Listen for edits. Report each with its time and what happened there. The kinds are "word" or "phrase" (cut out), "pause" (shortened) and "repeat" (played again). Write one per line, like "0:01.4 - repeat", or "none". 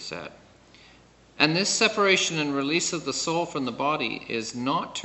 none